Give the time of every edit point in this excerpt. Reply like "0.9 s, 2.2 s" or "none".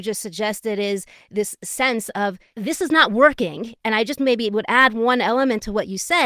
none